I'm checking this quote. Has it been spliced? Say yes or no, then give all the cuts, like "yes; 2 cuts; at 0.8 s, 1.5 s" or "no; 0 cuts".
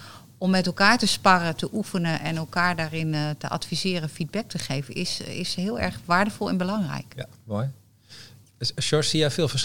no; 0 cuts